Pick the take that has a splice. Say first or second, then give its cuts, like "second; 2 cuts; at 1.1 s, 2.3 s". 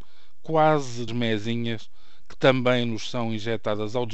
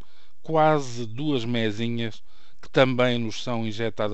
first; 1 cut; at 1.1 s